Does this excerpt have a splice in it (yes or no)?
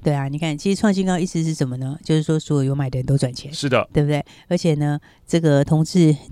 no